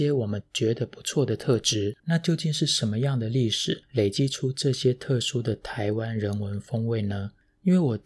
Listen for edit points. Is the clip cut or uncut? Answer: cut